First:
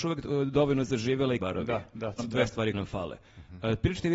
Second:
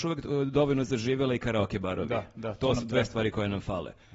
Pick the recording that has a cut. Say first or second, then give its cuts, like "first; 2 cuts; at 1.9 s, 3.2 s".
first; 3 cuts; at 1.4 s, 2.2 s, 2.7 s